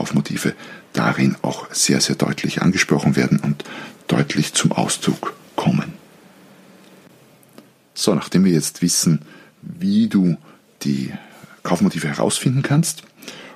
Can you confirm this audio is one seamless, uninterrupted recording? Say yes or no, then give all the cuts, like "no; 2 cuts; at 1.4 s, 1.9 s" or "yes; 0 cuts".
yes; 0 cuts